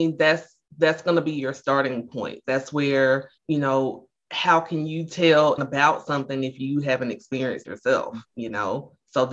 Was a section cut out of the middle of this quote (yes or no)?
yes